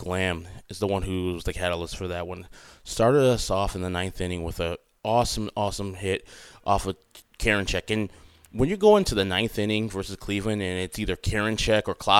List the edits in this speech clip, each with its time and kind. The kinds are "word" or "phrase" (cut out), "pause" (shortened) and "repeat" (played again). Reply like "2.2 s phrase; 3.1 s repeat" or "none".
none